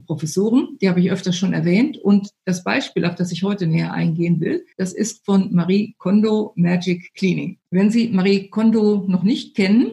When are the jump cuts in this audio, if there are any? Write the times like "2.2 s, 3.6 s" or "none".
4.7 s, 7.7 s